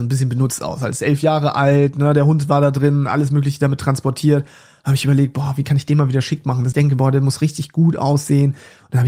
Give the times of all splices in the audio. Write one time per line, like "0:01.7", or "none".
0:06.7